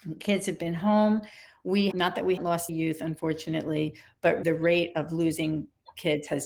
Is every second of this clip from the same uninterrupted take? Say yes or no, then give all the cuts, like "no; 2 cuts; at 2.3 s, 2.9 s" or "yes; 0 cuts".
no; 4 cuts; at 1.9 s, 2.4 s, 2.7 s, 4.4 s